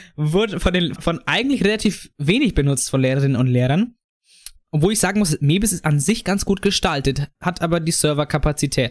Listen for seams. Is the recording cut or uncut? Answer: cut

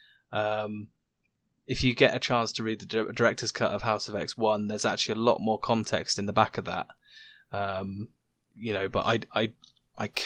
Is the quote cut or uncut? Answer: uncut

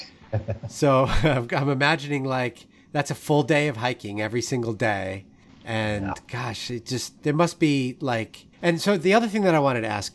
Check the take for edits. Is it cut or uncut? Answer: cut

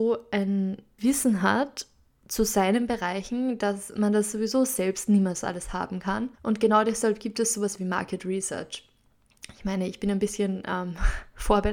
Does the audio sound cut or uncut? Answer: cut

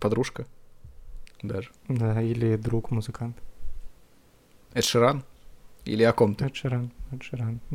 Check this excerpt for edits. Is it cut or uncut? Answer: cut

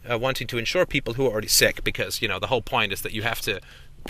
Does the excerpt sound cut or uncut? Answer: uncut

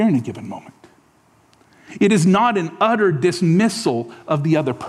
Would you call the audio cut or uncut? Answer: uncut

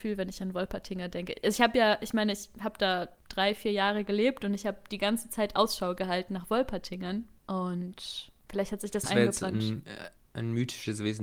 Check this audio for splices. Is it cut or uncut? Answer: cut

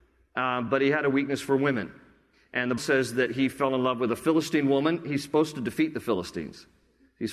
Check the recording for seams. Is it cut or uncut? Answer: cut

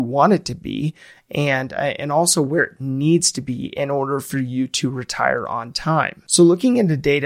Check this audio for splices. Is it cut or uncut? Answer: uncut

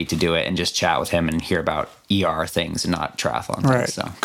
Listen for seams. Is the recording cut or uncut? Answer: uncut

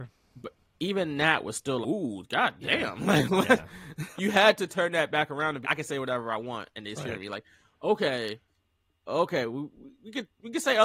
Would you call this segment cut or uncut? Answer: cut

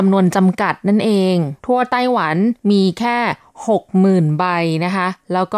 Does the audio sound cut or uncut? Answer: cut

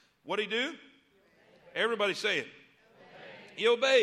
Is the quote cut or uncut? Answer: uncut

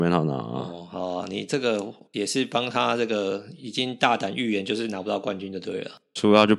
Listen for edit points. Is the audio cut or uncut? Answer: uncut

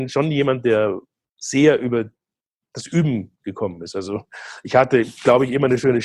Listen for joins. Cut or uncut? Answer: uncut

